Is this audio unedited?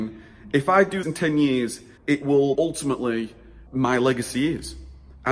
no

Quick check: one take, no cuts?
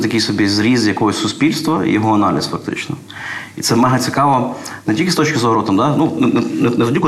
no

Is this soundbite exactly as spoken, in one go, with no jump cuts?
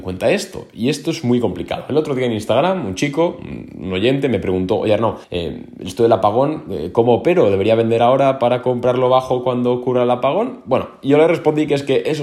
no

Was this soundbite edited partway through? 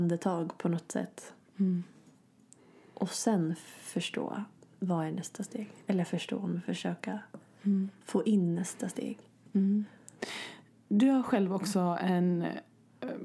no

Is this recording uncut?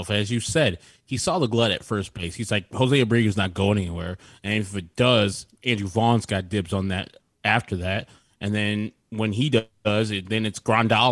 yes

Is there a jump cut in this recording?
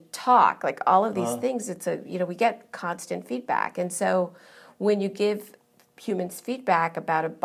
no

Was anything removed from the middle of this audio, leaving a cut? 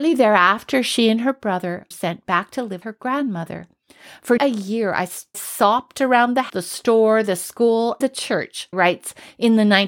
yes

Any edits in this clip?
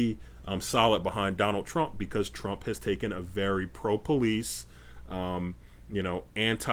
no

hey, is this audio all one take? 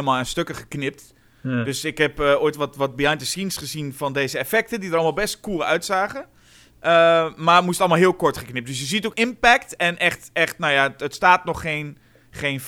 no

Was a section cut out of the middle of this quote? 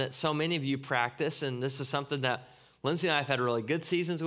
no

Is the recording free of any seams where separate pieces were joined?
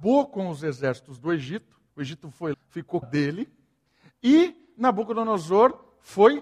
no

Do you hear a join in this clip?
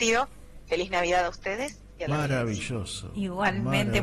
yes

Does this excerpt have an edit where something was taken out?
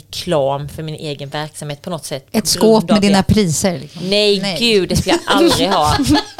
no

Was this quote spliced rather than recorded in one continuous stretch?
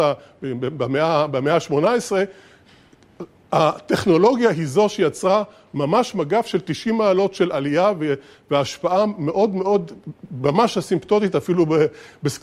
no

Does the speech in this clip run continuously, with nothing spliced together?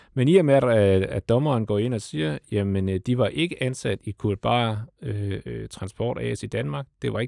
yes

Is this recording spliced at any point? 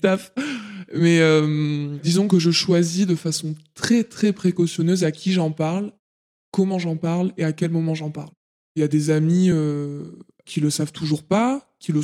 no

